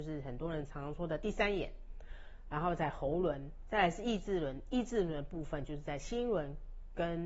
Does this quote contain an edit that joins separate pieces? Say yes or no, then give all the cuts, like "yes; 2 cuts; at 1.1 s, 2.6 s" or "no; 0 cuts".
yes; 1 cut; at 3.6 s